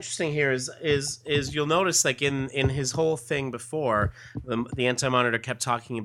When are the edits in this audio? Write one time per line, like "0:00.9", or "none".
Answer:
none